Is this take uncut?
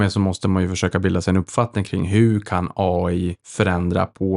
yes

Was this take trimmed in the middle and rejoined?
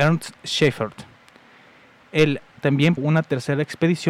yes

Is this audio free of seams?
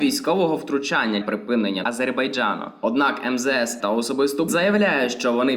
no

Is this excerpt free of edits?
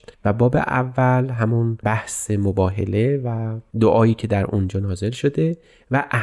yes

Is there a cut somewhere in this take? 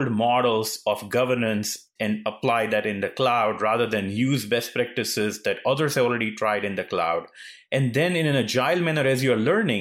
yes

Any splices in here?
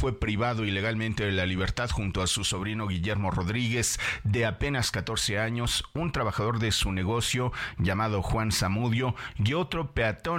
no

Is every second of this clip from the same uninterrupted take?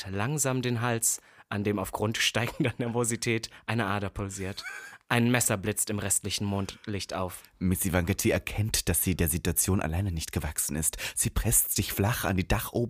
yes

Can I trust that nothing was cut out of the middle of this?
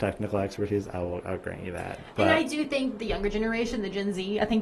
yes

